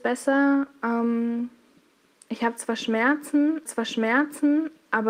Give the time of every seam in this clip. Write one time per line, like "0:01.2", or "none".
0:03.7